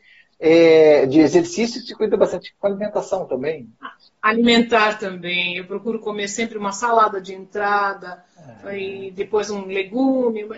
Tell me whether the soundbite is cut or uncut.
uncut